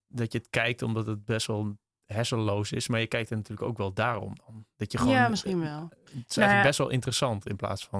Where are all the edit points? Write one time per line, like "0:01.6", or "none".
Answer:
none